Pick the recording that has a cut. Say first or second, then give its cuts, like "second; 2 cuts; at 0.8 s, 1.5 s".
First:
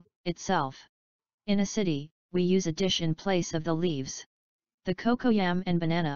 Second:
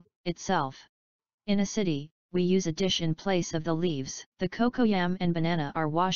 second; 1 cut; at 4.3 s